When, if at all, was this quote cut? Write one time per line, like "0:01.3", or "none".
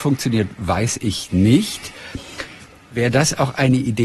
none